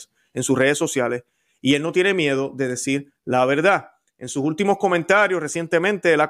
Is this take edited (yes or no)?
no